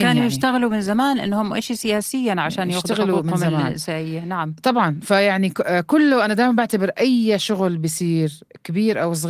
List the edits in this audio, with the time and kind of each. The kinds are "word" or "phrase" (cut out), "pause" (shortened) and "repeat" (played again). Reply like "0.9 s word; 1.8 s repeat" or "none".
none